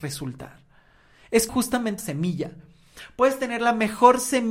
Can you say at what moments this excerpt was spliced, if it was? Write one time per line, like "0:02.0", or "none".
0:01.5
0:02.0